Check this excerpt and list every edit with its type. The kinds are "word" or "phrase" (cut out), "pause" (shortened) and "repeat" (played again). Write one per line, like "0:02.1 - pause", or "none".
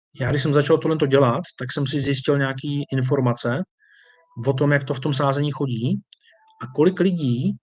none